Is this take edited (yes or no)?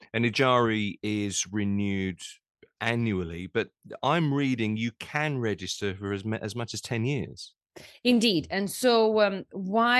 no